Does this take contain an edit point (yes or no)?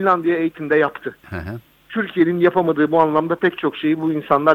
no